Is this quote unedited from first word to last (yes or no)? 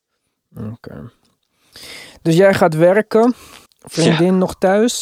no